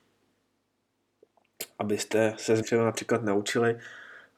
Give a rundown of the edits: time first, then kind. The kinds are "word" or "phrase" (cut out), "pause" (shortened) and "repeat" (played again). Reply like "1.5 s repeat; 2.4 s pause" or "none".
2.6 s word